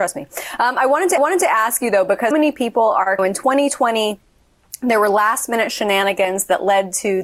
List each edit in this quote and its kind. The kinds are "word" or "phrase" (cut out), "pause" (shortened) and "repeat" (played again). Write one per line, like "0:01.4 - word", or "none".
0:01.2 - repeat
0:02.3 - word
0:03.2 - phrase

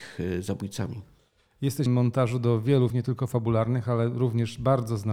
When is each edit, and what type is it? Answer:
0:01.9 - word
0:02.9 - word

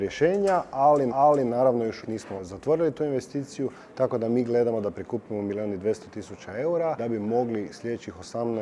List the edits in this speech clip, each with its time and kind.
0:01.1 - repeat
0:02.0 - word
0:02.4 - word
0:07.0 - word

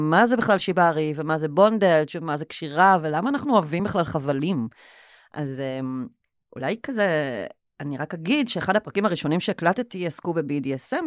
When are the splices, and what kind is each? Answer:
none

